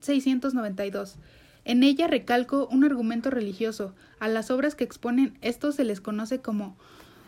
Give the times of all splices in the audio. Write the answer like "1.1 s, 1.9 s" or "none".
none